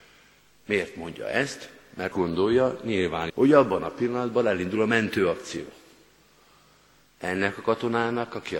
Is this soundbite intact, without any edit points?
no; 2 cuts; at 2.1 s, 3.3 s

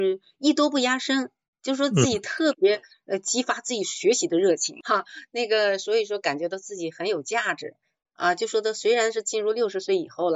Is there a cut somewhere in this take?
no; 0 cuts

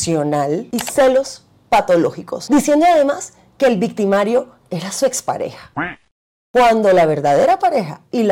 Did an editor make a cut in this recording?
no; 0 cuts

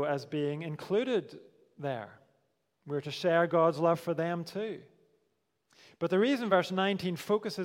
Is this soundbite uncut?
yes; 0 cuts

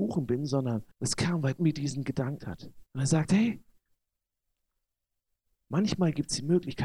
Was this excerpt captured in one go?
no; 4 cuts; at 0.9 s, 1.6 s, 2.4 s, 2.9 s

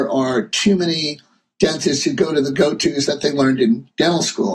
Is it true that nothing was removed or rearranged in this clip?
yes; 0 cuts

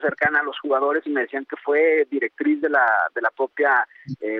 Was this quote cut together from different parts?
no; 0 cuts

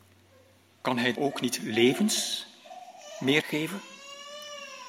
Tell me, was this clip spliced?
yes; 2 cuts; at 1.2 s, 3.4 s

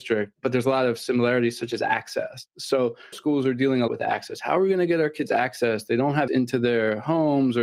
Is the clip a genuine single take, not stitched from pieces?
no; 3 cuts; at 3.1 s, 3.9 s, 6.3 s

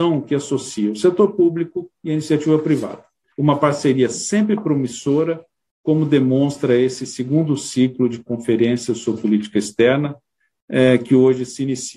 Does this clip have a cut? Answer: no; 0 cuts

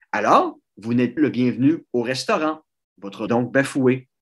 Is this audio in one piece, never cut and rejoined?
no; 2 cuts; at 1.2 s, 3.3 s

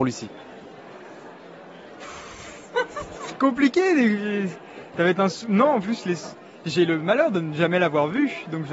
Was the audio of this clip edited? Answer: no; 0 cuts

